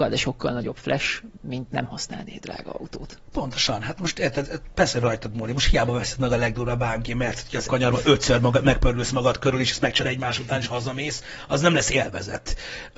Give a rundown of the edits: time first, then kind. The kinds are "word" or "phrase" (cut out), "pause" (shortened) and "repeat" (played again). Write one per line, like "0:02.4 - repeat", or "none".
0:01.4 - word
0:04.4 - word
0:07.7 - word
0:10.0 - word